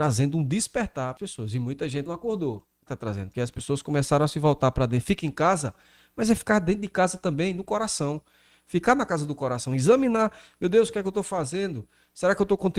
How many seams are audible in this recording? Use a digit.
4